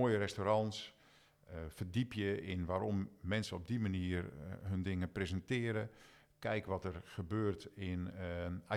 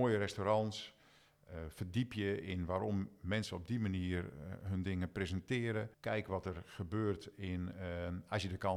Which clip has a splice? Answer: second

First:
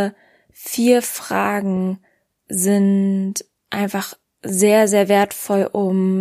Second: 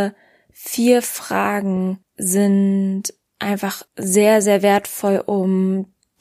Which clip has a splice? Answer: second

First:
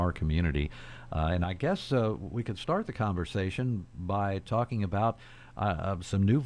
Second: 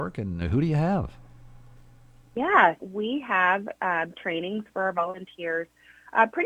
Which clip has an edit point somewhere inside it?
second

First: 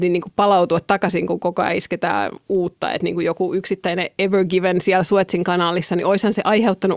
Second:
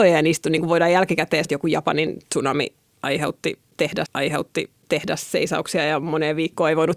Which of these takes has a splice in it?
second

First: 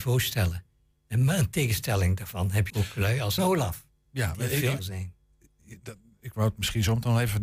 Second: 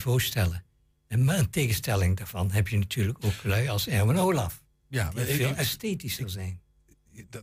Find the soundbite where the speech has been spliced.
first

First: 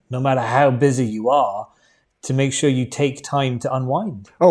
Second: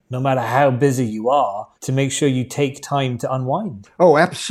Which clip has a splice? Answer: second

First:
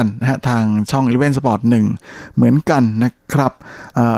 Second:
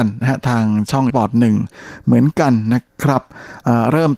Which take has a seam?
second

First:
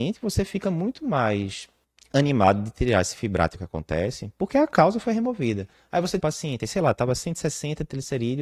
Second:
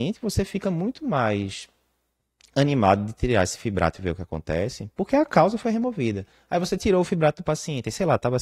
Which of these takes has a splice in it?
first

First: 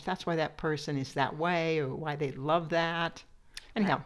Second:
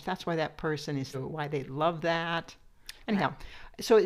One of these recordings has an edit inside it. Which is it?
second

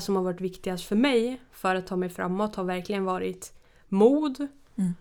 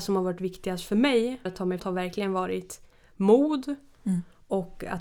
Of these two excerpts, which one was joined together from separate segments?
second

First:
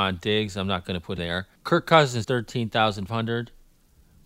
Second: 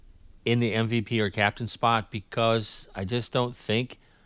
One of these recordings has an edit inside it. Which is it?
first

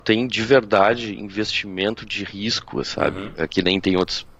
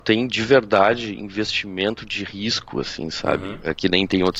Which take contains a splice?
first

